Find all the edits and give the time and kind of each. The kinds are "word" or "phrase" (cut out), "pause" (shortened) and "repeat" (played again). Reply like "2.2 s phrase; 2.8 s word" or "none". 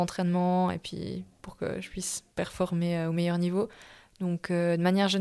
2.3 s pause